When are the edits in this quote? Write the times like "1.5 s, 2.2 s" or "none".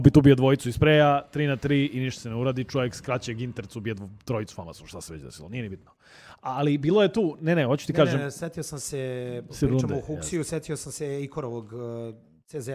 none